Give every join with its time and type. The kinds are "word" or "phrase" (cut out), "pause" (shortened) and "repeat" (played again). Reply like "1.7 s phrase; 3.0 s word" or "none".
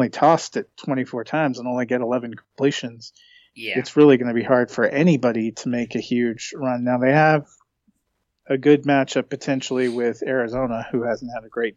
none